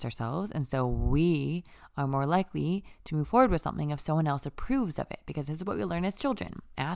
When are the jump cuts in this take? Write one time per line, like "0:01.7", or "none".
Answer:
none